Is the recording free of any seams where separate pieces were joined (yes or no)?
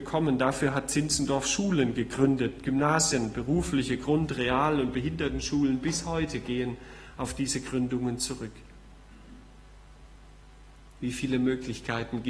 yes